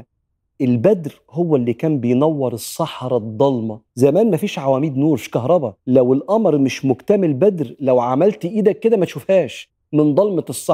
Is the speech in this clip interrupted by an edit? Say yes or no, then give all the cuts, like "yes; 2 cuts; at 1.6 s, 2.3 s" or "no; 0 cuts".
yes; 2 cuts; at 3.9 s, 5.8 s